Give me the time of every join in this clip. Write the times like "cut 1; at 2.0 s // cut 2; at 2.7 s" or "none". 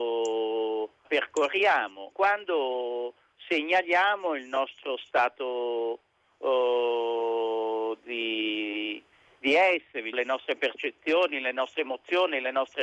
cut 1; at 1.0 s // cut 2; at 2.1 s // cut 3; at 10.1 s